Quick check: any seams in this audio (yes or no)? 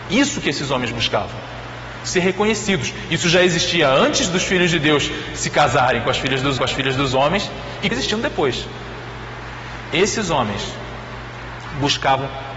yes